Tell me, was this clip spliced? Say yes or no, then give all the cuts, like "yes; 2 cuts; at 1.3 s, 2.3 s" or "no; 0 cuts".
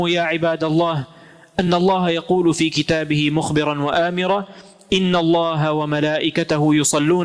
no; 0 cuts